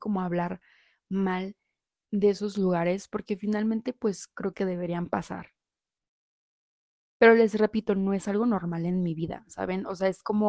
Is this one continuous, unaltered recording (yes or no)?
no